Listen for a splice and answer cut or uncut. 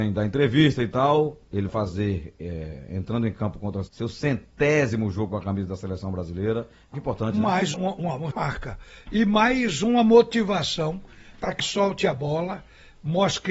cut